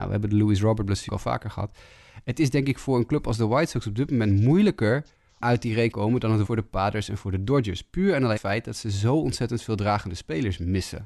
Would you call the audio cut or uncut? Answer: cut